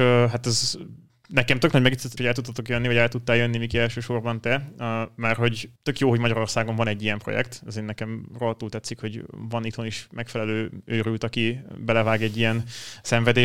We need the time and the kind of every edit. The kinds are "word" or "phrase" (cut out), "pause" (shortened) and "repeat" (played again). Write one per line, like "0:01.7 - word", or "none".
0:01.1 - pause
0:02.2 - word
0:05.8 - pause